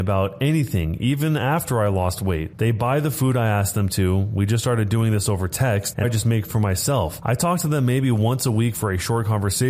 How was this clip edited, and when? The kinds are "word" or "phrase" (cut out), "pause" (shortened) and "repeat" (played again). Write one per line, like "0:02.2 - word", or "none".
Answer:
0:06.0 - word
0:06.5 - word